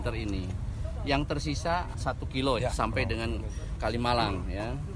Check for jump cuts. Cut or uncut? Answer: cut